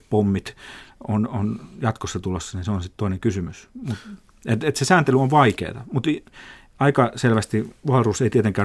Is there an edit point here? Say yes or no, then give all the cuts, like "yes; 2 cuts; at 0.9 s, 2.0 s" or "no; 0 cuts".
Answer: no; 0 cuts